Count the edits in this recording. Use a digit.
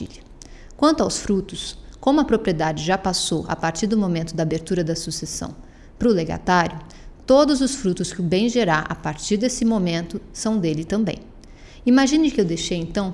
0